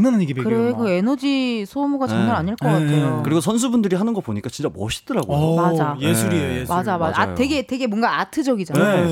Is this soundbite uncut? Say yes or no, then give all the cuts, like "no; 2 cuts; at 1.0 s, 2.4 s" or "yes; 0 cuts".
yes; 0 cuts